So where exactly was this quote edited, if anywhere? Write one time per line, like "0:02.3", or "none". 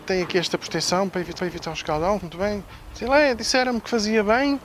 0:01.4
0:02.2

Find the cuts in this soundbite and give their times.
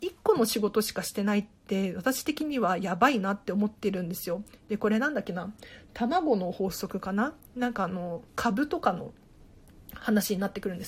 0:03.8
0:08.3

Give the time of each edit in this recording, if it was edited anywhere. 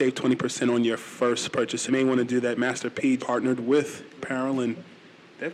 0:01.9
0:03.2
0:04.2

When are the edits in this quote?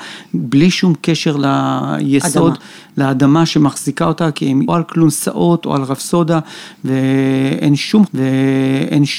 0:04.7
0:08.1

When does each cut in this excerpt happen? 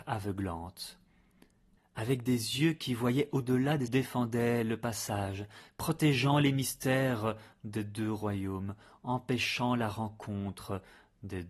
0:03.9

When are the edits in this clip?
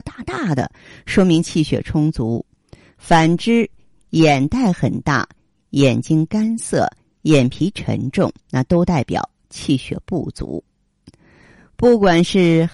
0:08.4

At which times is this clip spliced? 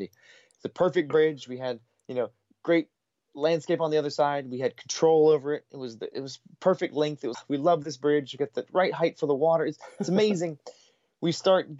0:07.3

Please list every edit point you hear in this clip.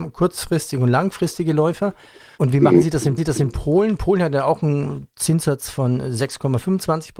0:03.2

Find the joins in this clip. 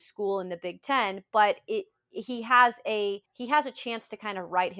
0:03.3

